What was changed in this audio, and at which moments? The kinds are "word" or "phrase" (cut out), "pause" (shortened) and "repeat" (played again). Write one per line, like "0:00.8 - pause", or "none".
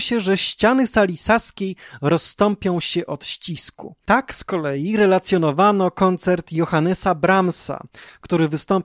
0:04.0 - pause